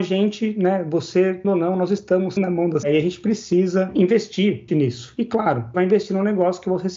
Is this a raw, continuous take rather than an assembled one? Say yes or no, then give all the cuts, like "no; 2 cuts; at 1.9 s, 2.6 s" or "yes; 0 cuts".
no; 5 cuts; at 1.4 s, 2.4 s, 2.8 s, 4.7 s, 5.7 s